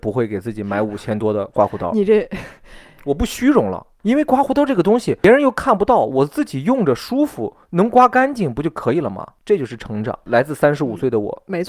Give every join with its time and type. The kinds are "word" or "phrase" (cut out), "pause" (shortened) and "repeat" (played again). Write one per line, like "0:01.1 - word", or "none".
0:07.6 - pause